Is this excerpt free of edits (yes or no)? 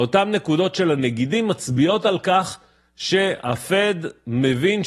yes